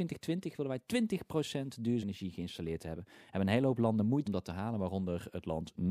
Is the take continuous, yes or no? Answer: no